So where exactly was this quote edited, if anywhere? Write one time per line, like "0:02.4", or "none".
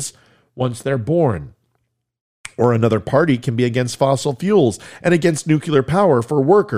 none